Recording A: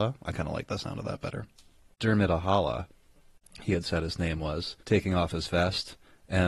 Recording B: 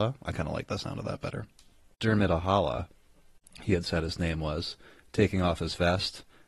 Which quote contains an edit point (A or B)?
A